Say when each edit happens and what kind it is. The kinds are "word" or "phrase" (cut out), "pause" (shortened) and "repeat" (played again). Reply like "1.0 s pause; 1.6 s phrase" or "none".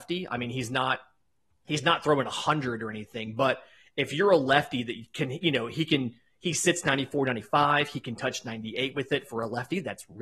none